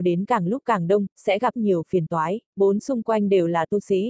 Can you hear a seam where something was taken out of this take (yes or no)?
yes